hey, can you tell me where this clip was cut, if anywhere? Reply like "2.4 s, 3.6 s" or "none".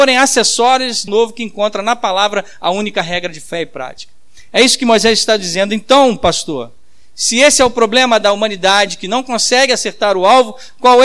1.1 s